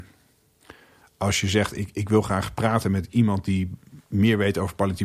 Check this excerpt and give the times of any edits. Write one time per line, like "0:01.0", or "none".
0:04.0